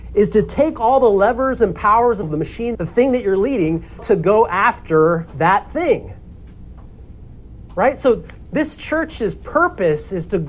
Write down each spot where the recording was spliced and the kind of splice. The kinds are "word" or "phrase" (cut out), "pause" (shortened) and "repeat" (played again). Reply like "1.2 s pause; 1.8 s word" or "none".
2.2 s phrase; 2.7 s phrase; 4.0 s word